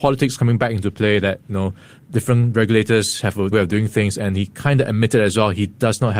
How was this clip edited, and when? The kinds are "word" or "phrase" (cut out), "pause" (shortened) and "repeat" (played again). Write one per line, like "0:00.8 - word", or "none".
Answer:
0:03.5 - word